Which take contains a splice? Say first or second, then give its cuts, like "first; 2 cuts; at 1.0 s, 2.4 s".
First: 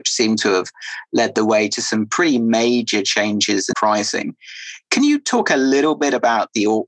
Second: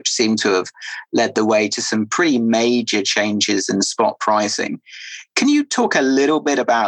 first; 1 cut; at 3.7 s